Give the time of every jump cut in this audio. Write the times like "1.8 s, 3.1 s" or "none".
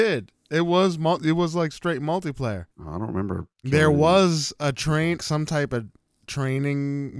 2.7 s, 3.5 s, 5.2 s